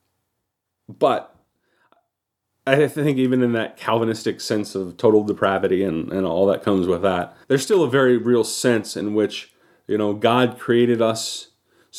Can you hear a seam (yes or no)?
yes